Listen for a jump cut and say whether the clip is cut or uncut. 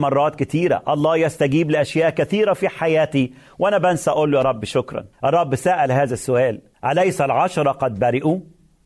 cut